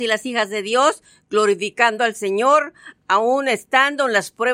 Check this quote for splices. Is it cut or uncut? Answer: uncut